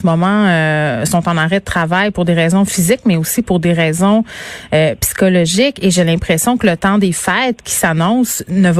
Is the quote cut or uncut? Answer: uncut